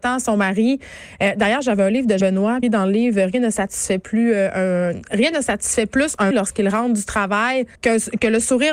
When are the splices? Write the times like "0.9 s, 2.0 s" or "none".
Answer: 2.2 s, 2.6 s, 6.3 s, 7.7 s